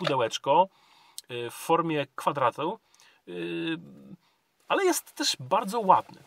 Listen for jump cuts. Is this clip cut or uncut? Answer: uncut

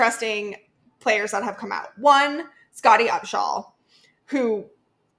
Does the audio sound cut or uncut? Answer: uncut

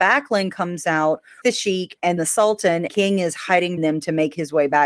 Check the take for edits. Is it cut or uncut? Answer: cut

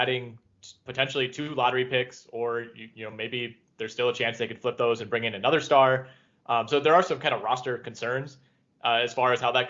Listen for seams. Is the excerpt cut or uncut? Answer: uncut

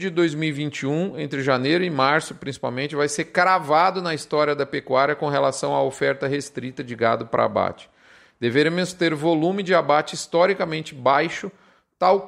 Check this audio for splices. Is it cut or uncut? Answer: uncut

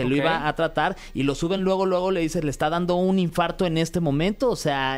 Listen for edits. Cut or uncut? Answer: uncut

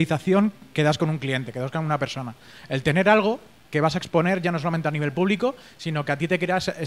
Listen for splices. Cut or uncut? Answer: uncut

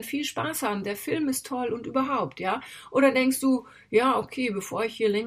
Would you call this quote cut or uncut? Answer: uncut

